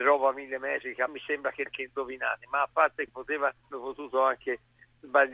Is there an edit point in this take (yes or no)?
yes